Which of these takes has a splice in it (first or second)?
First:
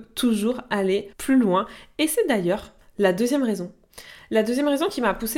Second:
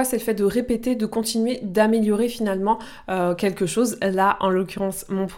first